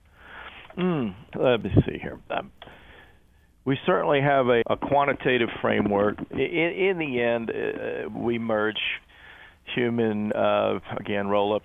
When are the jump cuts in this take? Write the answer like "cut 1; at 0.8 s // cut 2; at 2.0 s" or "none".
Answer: cut 1; at 1.3 s // cut 2; at 4.6 s // cut 3; at 8.1 s